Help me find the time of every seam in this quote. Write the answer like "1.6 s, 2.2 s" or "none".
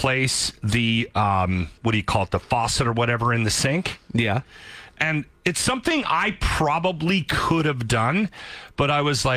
1.8 s